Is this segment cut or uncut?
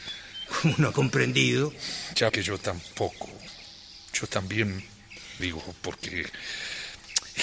cut